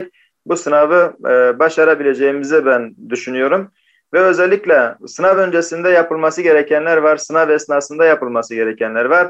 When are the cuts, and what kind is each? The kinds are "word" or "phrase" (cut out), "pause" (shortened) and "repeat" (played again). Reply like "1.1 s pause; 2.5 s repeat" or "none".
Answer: none